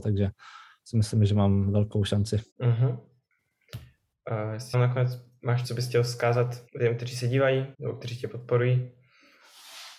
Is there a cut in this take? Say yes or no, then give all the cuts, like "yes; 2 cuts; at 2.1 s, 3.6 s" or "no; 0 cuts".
yes; 5 cuts; at 2.5 s, 4.7 s, 5.6 s, 6.7 s, 7.7 s